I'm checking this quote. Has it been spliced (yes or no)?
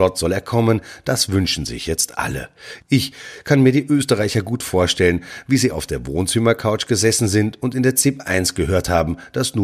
no